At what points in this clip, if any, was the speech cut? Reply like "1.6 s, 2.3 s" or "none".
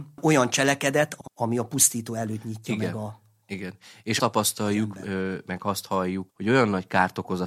4.2 s, 6.3 s